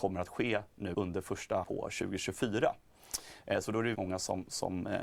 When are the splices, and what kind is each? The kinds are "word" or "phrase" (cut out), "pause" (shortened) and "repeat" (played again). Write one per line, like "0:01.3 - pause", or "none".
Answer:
0:00.9 - word
0:01.6 - word
0:03.9 - word

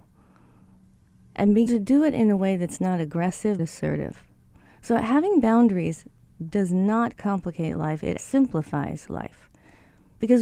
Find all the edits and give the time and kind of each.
0:01.7 - word
0:03.6 - word
0:08.2 - word

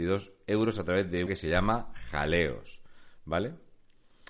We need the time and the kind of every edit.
0:01.3 - phrase

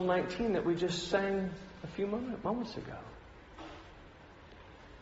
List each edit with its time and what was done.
none

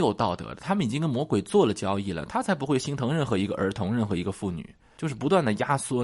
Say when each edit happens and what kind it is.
none

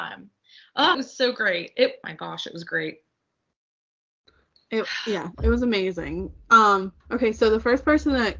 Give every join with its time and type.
0:00.9 - word
0:02.0 - word
0:07.0 - pause

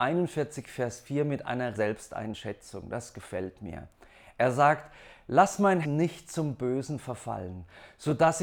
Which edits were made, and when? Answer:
0:01.7 - word
0:05.8 - word

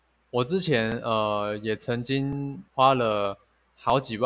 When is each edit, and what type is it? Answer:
0:02.7 - pause

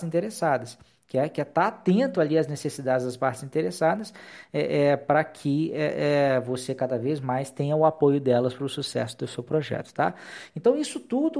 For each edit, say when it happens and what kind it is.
none

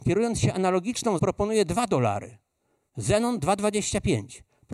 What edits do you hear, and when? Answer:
0:01.2 - word

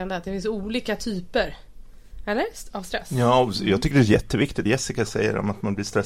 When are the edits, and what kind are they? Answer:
0:04.7 - word

